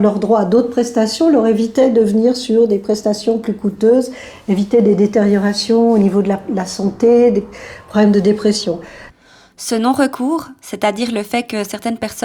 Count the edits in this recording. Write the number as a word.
zero